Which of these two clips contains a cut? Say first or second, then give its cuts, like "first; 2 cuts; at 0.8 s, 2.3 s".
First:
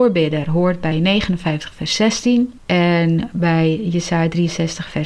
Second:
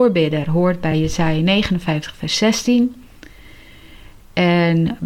first; 2 cuts; at 0.9 s, 2.6 s